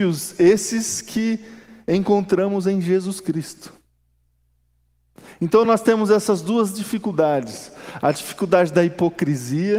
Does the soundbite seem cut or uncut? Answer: uncut